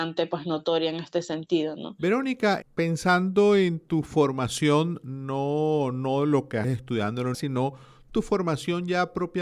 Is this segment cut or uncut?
cut